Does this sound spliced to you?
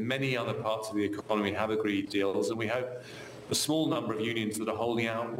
yes; 1 cut; at 2.1 s

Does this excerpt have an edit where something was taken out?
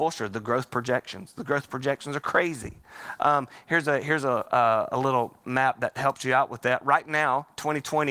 no; 0 cuts

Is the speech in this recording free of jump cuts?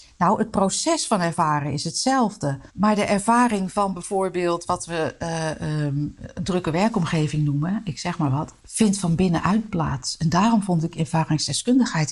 no; 2 cuts; at 2.7 s, 8.6 s

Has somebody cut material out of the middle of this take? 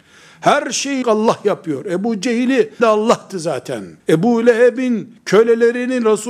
yes; 3 cuts; at 1.0 s, 2.8 s, 4.0 s

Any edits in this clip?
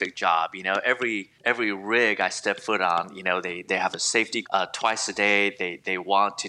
yes; 3 cuts; at 1.4 s, 3.6 s, 4.4 s

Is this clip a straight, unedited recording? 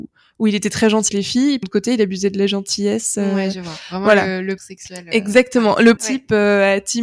no; 4 cuts; at 1.1 s, 1.6 s, 4.6 s, 6.0 s

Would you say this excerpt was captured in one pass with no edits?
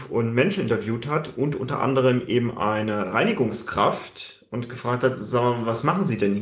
yes; 0 cuts

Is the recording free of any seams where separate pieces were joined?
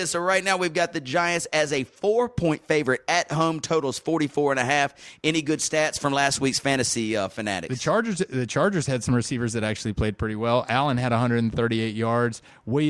yes; 0 cuts

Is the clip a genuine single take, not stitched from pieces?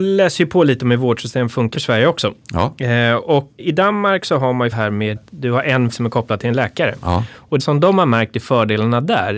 no; 6 cuts; at 1.7 s, 3.6 s, 4.7 s, 5.2 s, 5.9 s, 7.6 s

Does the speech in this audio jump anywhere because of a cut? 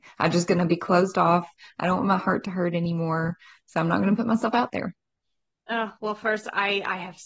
no; 0 cuts

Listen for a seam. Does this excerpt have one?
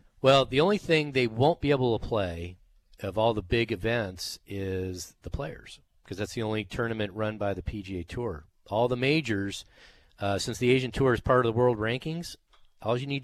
no; 0 cuts

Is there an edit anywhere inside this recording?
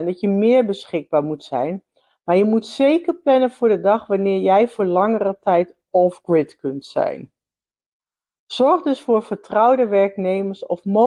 no; 0 cuts

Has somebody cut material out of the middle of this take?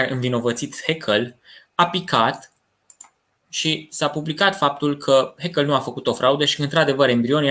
no; 0 cuts

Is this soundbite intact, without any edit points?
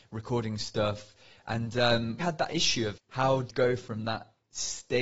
no; 3 cuts; at 2.2 s, 3.0 s, 3.5 s

